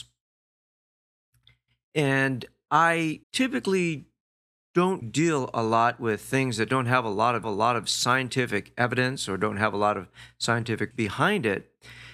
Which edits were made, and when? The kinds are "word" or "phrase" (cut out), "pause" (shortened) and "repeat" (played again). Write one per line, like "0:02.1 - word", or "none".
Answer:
0:03.2 - pause
0:05.0 - word
0:07.4 - repeat
0:10.9 - word